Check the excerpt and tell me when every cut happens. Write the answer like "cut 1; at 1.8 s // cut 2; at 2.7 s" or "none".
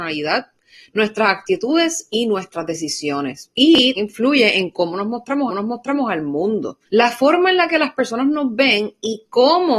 cut 1; at 4.0 s // cut 2; at 5.5 s // cut 3; at 6.9 s